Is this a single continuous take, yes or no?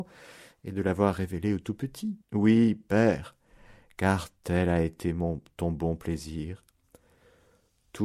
no